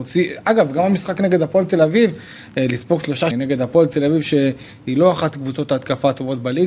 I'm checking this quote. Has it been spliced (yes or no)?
yes